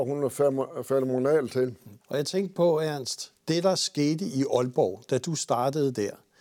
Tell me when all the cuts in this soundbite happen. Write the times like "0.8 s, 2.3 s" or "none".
2.0 s, 3.4 s